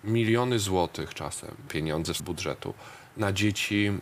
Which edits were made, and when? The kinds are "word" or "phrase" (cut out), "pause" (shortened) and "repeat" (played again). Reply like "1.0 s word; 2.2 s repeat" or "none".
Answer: 1.7 s word; 2.2 s word